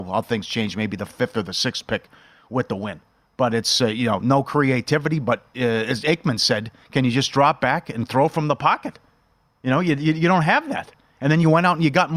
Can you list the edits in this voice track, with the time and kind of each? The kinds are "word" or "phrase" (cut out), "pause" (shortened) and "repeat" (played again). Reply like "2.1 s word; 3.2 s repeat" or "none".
none